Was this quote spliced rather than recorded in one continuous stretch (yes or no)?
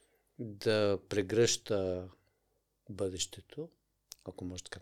no